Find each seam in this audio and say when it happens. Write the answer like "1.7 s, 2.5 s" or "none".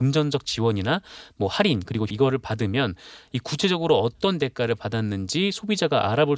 2.1 s